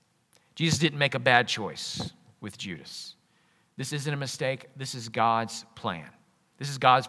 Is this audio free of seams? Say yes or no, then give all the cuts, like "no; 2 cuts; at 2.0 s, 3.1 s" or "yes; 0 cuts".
yes; 0 cuts